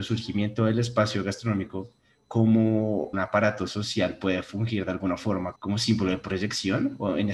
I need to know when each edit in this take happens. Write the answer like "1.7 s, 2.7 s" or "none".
3.1 s, 5.6 s